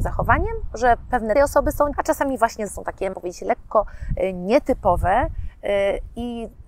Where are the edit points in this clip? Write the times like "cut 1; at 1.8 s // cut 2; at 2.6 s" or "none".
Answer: cut 1; at 1.3 s // cut 2; at 1.9 s // cut 3; at 2.7 s // cut 4; at 3.1 s